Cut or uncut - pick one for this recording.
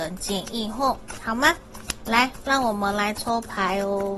uncut